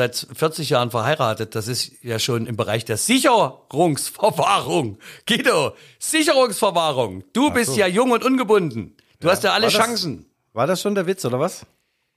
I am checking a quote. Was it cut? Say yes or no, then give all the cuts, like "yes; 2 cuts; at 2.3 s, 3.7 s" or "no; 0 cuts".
no; 0 cuts